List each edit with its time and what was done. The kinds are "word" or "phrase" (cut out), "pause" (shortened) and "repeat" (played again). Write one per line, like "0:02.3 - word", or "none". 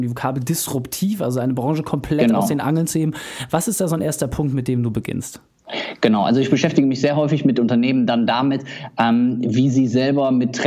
none